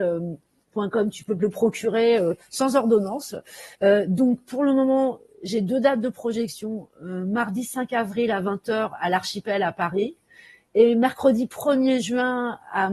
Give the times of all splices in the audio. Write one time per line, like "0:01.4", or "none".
0:03.7